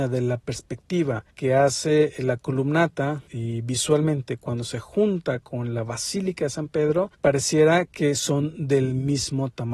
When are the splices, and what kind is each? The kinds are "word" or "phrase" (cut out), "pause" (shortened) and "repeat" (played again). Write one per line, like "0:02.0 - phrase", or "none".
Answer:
0:01.3 - pause
0:03.3 - word
0:07.1 - pause